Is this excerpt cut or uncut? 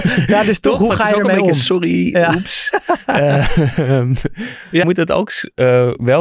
cut